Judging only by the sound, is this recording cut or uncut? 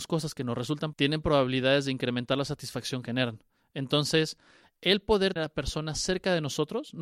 cut